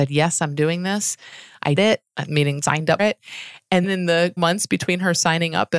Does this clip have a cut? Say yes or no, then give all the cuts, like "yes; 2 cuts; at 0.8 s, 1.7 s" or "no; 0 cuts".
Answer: yes; 5 cuts; at 1.8 s, 2.6 s, 3.0 s, 3.8 s, 4.4 s